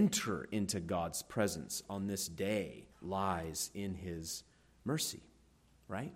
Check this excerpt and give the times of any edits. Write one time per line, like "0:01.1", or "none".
0:02.9